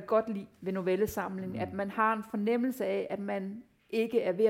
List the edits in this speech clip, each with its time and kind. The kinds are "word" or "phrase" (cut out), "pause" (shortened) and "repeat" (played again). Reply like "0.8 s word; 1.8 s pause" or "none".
none